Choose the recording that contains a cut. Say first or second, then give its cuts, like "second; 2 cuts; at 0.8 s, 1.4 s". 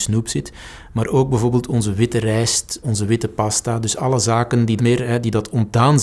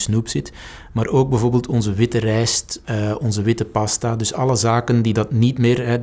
first; 2 cuts; at 2.8 s, 4.8 s